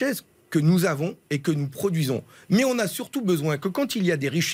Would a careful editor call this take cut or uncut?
uncut